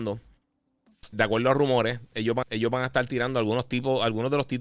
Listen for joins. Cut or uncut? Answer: cut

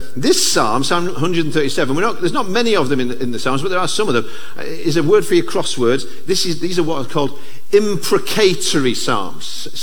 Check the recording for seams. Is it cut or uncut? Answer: uncut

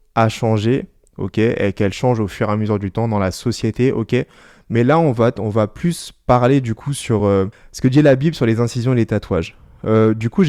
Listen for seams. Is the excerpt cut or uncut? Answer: uncut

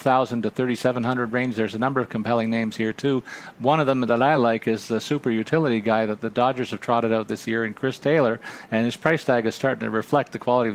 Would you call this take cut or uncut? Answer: uncut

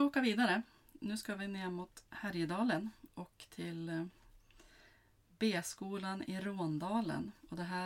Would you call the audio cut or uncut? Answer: uncut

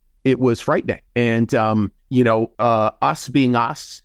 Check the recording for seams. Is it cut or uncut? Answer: cut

